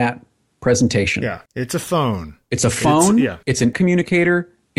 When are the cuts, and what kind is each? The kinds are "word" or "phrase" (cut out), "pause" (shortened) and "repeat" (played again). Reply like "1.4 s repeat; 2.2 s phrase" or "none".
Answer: 1.5 s pause; 3.4 s pause; 3.7 s word